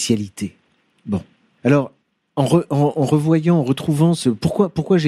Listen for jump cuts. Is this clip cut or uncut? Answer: uncut